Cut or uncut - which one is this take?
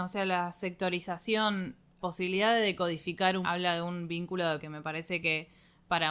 cut